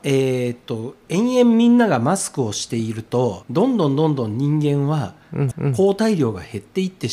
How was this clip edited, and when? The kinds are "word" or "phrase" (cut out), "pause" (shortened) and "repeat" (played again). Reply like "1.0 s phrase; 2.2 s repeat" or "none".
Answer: 3.4 s phrase; 5.5 s repeat